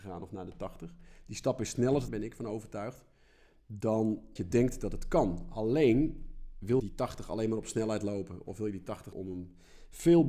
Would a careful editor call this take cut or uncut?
cut